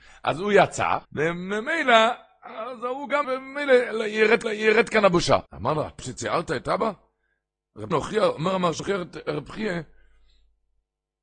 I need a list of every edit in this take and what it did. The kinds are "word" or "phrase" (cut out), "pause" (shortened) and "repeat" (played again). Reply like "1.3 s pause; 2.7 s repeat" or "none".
1.0 s pause; 3.2 s word; 4.4 s repeat; 5.5 s pause; 6.0 s word; 7.9 s word; 8.8 s phrase